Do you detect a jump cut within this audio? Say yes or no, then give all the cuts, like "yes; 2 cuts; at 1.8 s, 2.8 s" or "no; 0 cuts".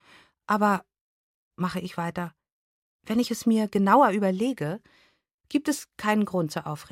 no; 0 cuts